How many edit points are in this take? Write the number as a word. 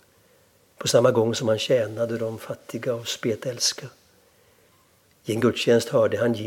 zero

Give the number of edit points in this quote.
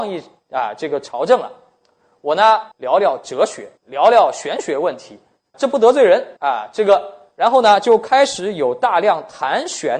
four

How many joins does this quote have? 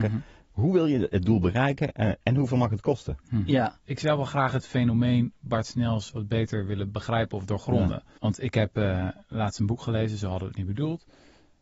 one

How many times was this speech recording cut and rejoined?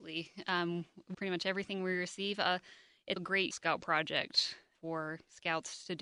four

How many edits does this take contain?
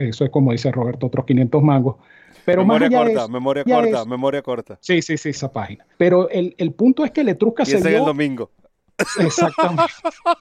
three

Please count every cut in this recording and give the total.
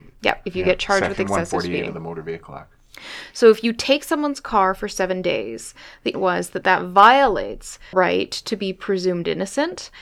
two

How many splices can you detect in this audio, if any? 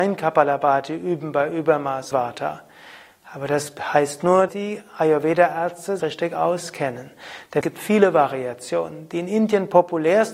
four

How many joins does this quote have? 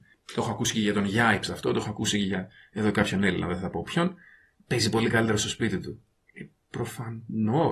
zero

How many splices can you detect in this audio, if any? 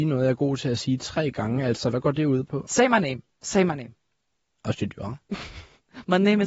one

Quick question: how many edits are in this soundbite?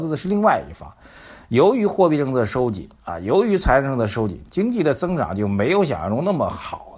one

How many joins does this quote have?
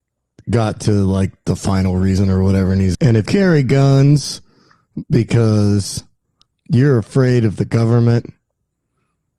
two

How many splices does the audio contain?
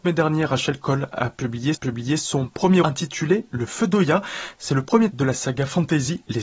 three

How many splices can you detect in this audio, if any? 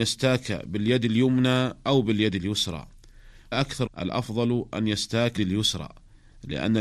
three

